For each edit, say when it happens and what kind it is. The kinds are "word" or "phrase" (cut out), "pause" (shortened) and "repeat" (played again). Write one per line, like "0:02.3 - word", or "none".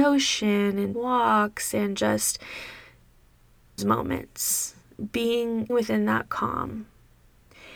0:00.9 - word
0:03.8 - phrase
0:05.7 - word